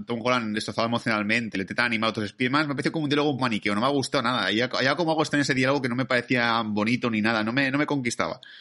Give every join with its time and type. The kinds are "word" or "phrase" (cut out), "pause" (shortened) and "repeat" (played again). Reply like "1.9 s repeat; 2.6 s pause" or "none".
1.5 s word; 3.4 s word